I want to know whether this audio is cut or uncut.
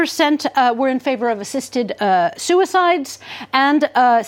uncut